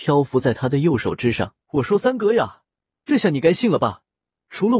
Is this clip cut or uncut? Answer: cut